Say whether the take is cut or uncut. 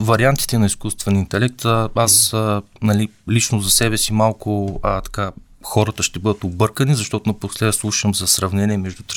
uncut